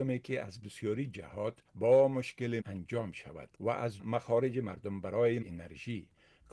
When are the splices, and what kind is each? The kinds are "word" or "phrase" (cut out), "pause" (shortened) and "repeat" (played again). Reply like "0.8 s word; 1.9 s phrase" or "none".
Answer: 1.7 s pause; 2.6 s phrase; 3.5 s pause; 4.0 s word; 5.4 s word